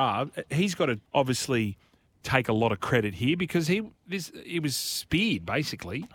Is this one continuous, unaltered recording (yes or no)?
no